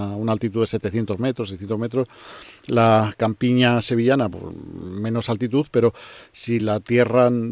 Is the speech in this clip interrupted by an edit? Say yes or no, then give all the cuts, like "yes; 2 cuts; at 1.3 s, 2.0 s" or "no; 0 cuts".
no; 0 cuts